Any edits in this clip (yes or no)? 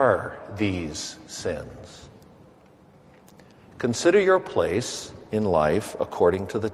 no